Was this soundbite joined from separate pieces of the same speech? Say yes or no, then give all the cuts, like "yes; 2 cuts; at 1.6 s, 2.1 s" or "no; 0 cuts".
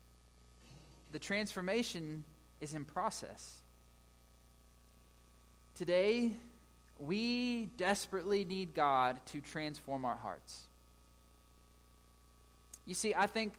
no; 0 cuts